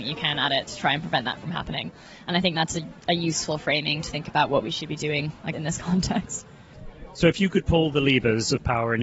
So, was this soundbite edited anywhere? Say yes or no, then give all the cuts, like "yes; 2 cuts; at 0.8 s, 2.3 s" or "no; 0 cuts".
yes; 1 cut; at 5.5 s